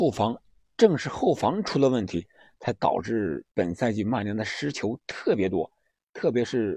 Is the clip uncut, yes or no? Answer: no